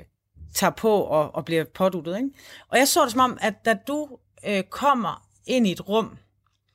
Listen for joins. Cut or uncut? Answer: uncut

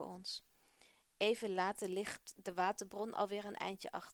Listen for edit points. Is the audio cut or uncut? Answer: uncut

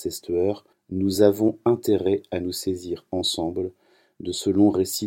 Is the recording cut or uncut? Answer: uncut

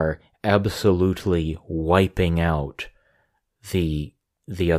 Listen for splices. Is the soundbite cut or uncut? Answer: uncut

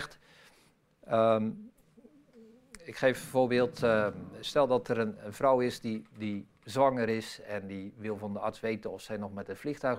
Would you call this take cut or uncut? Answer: cut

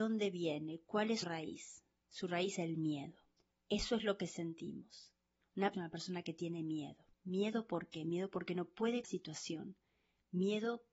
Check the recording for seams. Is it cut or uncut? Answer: cut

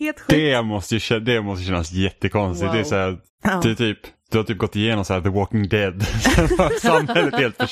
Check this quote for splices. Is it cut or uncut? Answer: cut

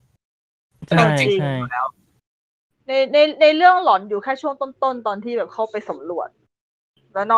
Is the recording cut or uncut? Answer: uncut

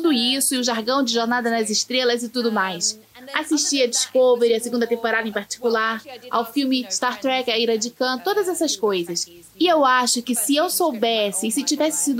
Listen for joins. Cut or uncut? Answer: uncut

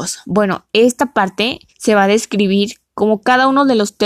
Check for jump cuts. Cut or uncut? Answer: cut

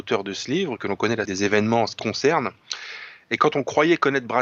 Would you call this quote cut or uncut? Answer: cut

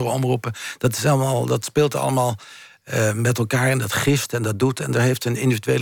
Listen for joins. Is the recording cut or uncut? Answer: uncut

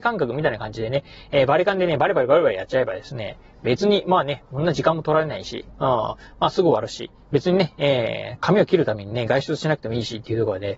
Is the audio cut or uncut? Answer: uncut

